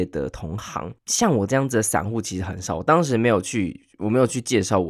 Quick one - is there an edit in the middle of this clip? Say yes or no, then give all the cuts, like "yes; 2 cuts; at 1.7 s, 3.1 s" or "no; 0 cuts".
yes; 1 cut; at 1.0 s